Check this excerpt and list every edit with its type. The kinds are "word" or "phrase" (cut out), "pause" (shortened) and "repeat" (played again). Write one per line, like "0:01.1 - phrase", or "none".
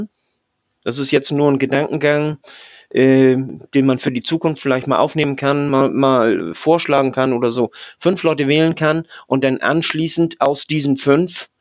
none